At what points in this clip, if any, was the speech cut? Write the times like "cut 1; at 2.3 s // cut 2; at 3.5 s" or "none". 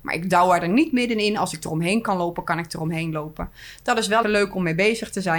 cut 1; at 4.2 s